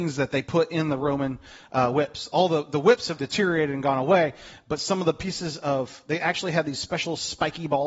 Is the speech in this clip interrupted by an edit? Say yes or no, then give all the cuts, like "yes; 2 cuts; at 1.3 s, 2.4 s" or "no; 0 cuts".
yes; 1 cut; at 3.2 s